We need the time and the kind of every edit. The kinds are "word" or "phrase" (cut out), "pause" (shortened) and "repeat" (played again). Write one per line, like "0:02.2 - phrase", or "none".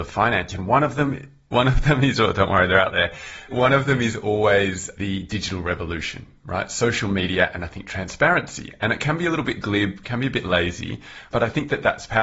none